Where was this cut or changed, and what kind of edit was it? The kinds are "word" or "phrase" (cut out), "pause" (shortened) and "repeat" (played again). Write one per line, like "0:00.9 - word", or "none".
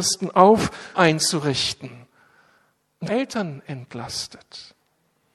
0:00.9 - word
0:03.1 - phrase